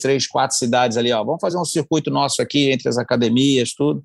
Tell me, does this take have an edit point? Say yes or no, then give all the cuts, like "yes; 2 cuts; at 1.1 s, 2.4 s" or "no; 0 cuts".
no; 0 cuts